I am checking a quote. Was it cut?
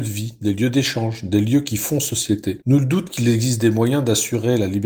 no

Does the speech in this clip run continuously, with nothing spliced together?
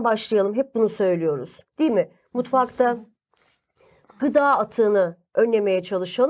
no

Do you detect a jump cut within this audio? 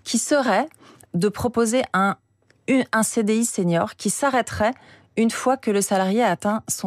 no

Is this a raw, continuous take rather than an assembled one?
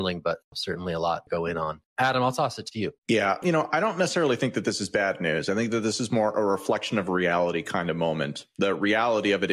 no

